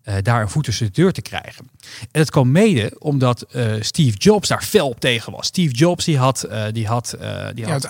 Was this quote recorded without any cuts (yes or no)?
yes